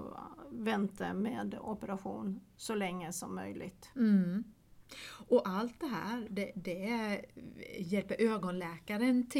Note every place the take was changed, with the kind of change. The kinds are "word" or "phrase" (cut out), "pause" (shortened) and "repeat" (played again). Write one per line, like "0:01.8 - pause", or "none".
none

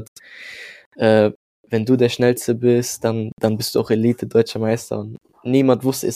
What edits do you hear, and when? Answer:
none

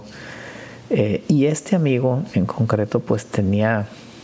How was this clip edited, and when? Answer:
none

